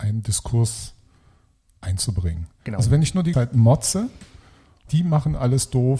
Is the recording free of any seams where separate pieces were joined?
no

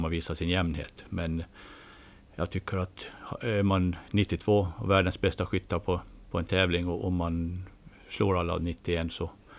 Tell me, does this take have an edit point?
no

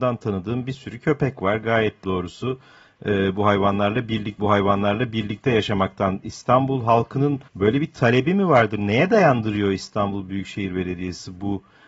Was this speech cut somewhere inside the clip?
yes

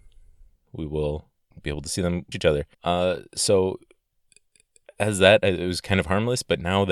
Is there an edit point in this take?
yes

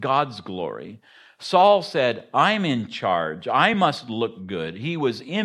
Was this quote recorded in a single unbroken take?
yes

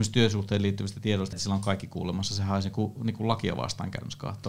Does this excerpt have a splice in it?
yes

